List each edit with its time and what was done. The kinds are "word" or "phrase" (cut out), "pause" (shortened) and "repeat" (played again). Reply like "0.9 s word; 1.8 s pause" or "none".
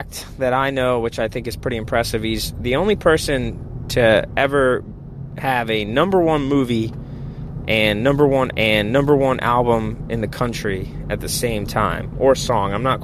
8.5 s repeat